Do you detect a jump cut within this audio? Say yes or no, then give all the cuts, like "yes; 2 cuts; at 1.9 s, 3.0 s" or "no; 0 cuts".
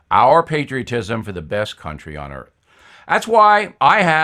no; 0 cuts